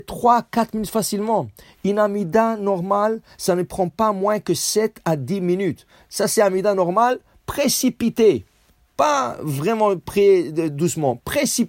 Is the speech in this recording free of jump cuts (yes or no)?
yes